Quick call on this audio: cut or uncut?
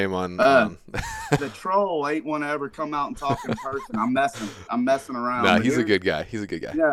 cut